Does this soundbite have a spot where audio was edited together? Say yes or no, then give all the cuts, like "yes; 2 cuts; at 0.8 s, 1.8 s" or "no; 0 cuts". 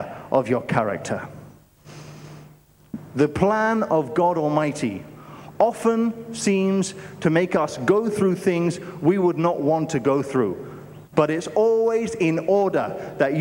yes; 1 cut; at 11.1 s